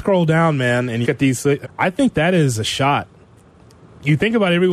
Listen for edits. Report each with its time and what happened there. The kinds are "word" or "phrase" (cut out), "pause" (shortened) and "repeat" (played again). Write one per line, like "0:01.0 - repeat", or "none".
0:01.0 - word
0:01.6 - word
0:02.1 - word